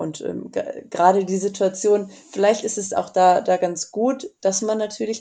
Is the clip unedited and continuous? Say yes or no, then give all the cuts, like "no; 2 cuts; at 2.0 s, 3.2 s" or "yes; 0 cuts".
yes; 0 cuts